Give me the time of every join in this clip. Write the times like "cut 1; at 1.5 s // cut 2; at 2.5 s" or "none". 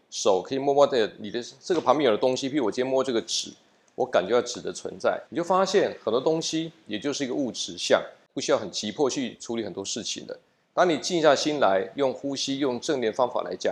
cut 1; at 5.3 s